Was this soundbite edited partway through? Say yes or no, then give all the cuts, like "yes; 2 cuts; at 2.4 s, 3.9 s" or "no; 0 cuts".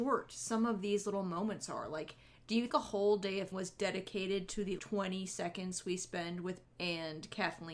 yes; 4 cuts; at 2.7 s, 3.5 s, 4.8 s, 6.6 s